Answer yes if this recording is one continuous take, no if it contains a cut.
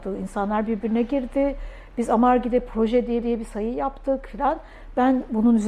no